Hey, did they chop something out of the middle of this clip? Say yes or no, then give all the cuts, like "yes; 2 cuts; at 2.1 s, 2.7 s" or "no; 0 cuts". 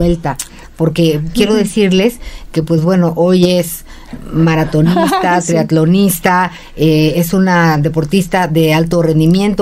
no; 0 cuts